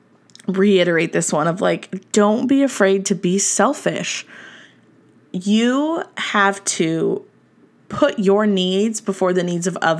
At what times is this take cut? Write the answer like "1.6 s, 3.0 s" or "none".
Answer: none